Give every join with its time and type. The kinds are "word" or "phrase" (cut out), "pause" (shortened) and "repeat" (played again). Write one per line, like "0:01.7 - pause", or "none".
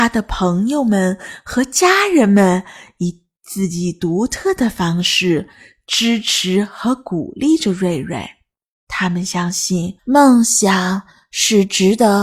0:10.0 - pause